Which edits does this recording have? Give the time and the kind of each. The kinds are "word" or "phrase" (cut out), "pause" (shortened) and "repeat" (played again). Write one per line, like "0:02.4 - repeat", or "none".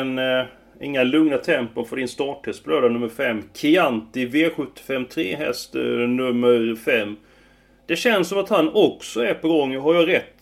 none